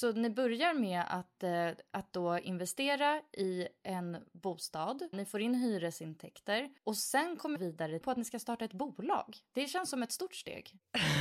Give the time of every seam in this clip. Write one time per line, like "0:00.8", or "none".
0:05.1
0:06.8
0:07.6
0:08.0